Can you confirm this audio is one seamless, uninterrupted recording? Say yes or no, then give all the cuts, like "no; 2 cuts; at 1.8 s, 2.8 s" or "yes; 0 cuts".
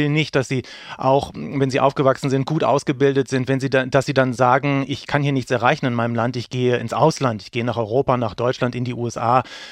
yes; 0 cuts